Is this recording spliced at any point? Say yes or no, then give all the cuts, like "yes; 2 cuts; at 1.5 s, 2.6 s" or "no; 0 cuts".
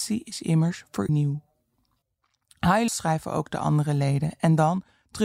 yes; 2 cuts; at 1.1 s, 2.9 s